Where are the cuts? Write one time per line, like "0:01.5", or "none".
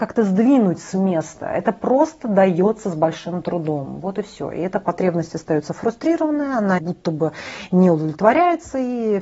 0:06.8

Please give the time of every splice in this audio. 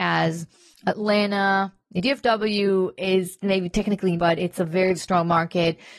0:02.0
0:04.2
0:05.0

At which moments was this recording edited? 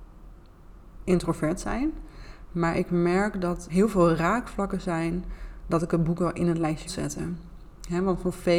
0:03.7
0:06.9

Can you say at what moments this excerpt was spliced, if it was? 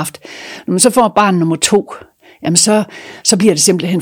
none

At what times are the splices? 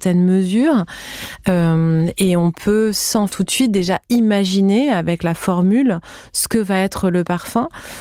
0:03.3

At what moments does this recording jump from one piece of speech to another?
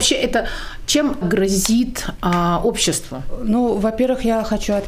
0:01.2

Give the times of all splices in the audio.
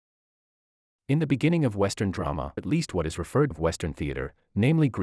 0:02.6
0:03.5

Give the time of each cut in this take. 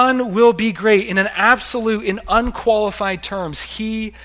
none

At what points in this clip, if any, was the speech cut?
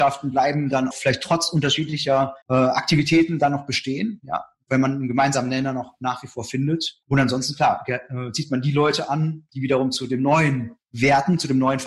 0:00.9
0:02.4
0:07.0
0:10.8

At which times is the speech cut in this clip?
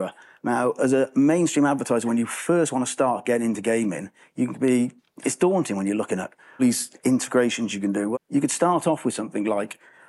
0:06.6
0:08.1

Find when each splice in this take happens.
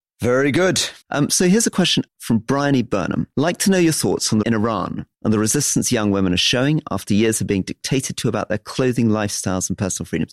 0:01.0
0:02.1
0:03.3
0:04.4
0:05.1

